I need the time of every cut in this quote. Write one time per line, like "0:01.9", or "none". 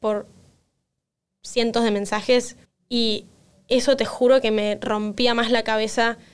0:02.6